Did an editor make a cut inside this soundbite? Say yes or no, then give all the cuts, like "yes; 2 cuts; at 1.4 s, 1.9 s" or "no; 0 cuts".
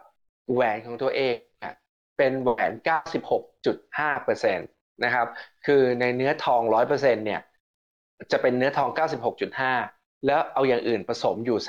no; 0 cuts